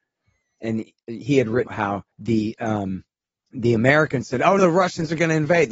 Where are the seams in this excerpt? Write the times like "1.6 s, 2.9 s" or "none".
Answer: 1.7 s, 2.1 s, 3.2 s, 4.6 s

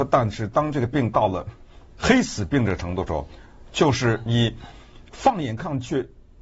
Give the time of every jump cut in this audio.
1.8 s

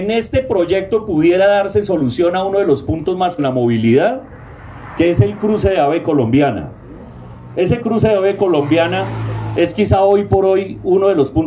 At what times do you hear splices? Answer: 3.4 s

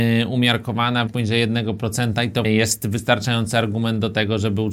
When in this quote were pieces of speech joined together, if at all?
1.1 s, 2.4 s

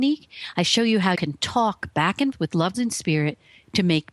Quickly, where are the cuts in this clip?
1.2 s, 2.3 s, 2.7 s

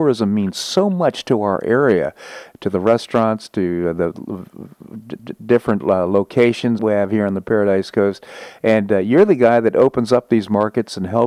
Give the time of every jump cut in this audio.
5.2 s, 6.8 s

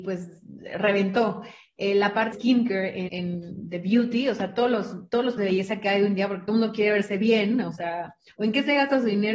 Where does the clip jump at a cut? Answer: 2.3 s, 3.1 s, 5.4 s

